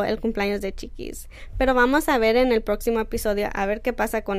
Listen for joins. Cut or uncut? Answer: uncut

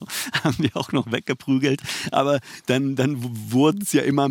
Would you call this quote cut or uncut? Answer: uncut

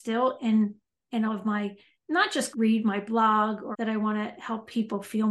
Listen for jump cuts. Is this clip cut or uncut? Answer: cut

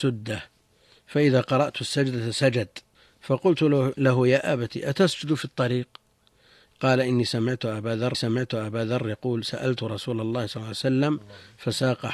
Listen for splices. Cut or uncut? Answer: cut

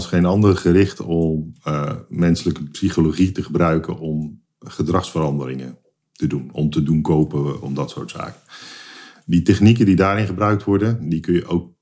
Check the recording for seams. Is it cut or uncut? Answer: uncut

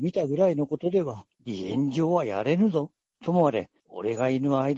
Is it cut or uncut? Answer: cut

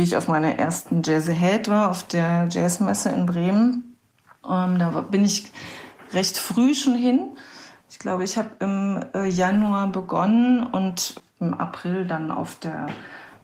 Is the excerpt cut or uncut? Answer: uncut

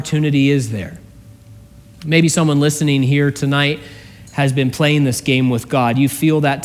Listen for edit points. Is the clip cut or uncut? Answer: uncut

